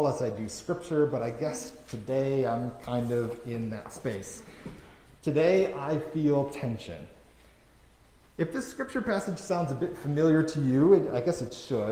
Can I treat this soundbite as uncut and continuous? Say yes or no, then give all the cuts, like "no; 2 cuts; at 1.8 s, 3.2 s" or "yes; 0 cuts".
yes; 0 cuts